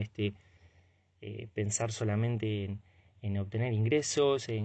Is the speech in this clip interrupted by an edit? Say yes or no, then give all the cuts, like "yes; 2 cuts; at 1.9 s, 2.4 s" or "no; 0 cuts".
no; 0 cuts